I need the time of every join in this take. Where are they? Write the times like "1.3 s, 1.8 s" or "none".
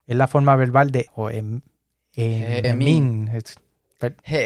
1.1 s, 2.6 s